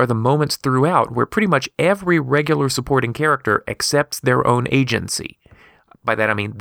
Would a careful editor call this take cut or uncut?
uncut